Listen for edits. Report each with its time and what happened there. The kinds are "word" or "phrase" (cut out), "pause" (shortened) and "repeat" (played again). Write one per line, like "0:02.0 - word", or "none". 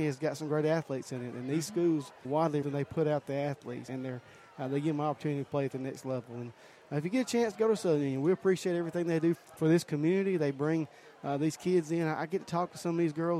0:02.2 - word
0:02.6 - phrase
0:03.9 - word
0:09.3 - phrase